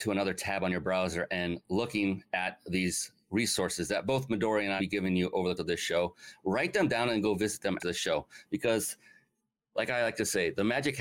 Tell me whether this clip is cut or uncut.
cut